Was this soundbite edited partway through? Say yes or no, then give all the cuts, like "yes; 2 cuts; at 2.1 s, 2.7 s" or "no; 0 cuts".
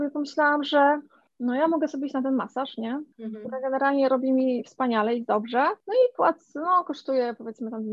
no; 0 cuts